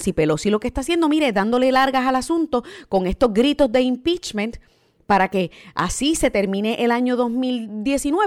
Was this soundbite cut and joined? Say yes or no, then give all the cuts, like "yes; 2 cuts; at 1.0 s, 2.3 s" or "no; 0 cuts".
no; 0 cuts